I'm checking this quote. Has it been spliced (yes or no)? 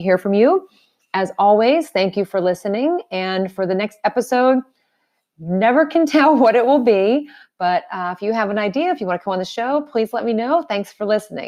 no